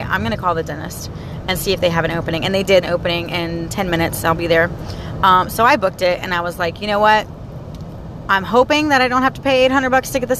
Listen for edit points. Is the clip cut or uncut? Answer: cut